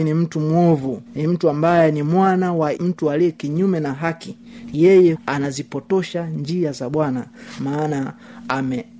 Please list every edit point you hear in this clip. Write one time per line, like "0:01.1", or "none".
0:01.1
0:02.8
0:05.1